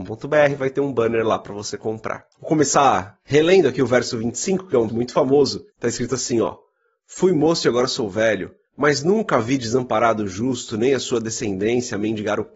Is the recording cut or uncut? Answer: cut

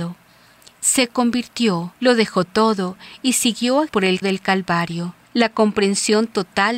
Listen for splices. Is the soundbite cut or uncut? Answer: cut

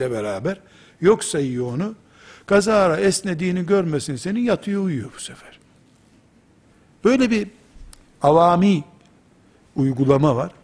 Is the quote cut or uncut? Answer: uncut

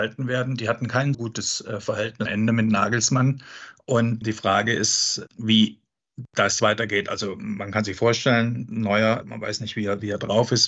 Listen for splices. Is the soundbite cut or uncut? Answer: cut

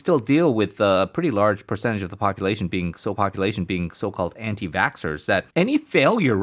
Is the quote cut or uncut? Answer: cut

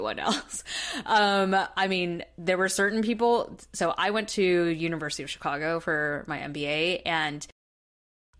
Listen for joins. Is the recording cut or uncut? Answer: uncut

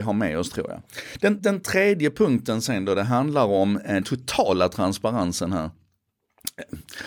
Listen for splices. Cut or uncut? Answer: cut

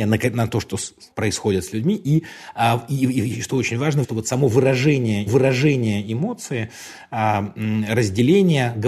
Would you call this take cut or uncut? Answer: cut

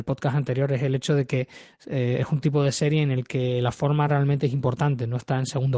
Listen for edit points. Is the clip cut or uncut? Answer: uncut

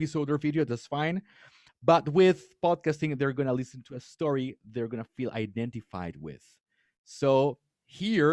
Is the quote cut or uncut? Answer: uncut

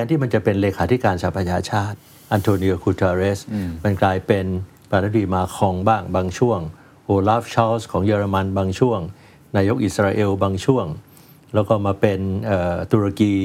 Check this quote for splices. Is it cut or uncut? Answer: uncut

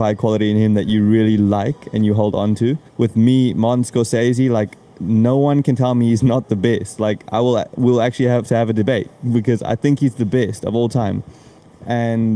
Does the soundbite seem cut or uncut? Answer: cut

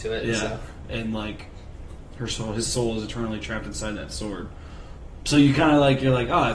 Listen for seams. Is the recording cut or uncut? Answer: uncut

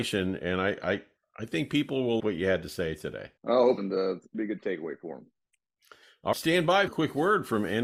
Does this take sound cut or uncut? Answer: cut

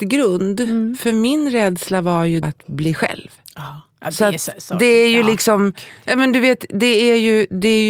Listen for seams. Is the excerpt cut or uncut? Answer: cut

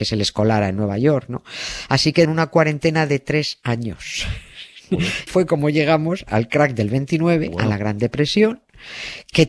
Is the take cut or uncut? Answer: cut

